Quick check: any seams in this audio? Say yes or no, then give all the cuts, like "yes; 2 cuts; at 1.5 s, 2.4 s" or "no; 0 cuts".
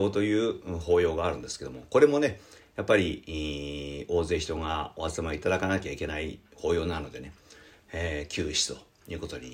no; 0 cuts